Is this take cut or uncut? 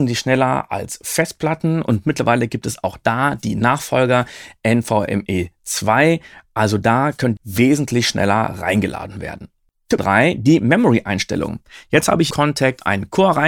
cut